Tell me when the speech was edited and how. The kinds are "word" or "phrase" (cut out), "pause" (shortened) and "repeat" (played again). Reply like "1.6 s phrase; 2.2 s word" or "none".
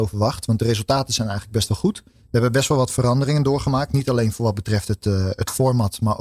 2.1 s pause